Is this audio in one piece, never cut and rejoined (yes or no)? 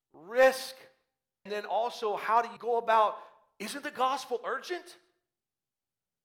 no